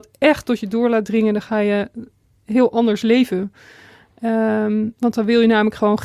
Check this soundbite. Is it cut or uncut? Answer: uncut